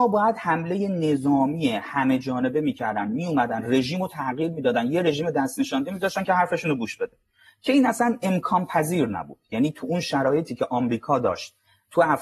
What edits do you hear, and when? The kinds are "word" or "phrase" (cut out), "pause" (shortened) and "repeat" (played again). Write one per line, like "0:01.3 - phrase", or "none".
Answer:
none